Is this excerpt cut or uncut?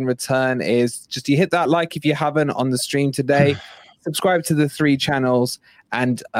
uncut